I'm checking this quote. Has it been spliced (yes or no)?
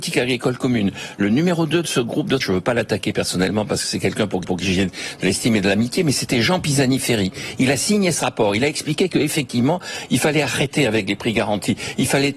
yes